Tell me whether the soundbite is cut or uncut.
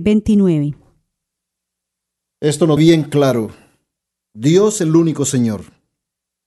cut